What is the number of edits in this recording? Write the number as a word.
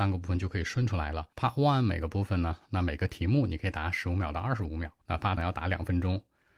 three